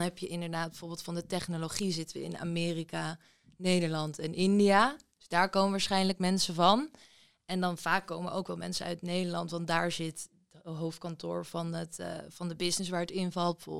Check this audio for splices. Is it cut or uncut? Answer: uncut